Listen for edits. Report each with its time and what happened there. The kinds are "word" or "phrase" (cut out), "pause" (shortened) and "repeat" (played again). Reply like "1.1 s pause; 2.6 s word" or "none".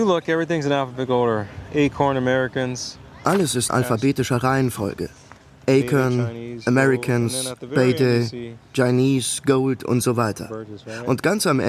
3.7 s word